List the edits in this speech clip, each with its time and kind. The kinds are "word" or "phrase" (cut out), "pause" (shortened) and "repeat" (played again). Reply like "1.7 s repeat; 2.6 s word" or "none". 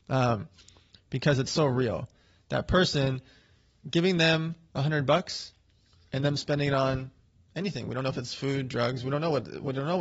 none